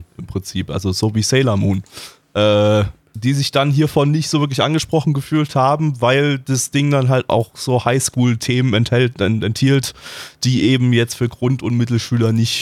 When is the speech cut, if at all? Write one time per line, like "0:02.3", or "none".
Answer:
none

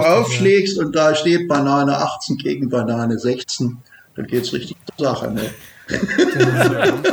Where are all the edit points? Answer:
none

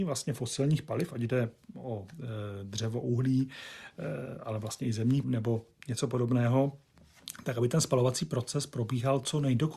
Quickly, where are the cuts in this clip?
0:05.2

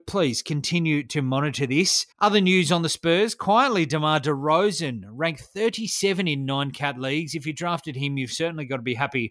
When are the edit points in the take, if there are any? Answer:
0:02.1

